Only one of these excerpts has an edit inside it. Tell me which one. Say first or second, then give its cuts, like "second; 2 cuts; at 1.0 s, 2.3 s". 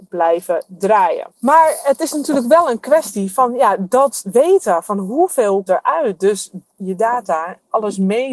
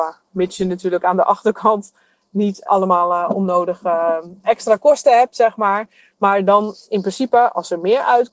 first; 2 cuts; at 1.3 s, 5.7 s